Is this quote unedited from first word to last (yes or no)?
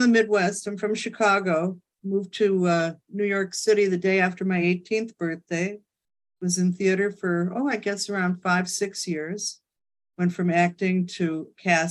yes